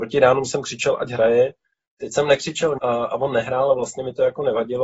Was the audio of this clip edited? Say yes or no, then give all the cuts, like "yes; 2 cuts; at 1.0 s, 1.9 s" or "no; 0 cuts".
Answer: yes; 1 cut; at 2.8 s